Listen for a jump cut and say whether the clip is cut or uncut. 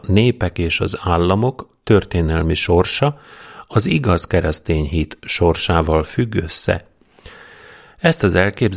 uncut